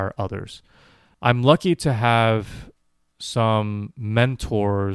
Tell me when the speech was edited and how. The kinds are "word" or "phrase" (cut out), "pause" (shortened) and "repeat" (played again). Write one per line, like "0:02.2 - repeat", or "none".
none